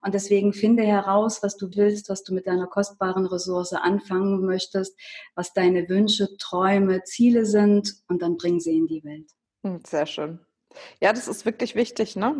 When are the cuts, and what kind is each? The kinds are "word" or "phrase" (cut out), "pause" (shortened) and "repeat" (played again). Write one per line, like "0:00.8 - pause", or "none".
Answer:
0:01.7 - word

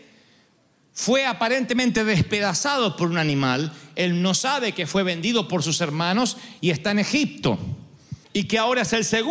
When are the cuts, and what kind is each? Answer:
0:08.2 - pause

